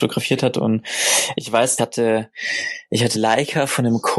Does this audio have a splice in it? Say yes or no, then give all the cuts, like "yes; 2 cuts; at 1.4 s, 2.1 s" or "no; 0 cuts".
yes; 2 cuts; at 1.8 s, 3.1 s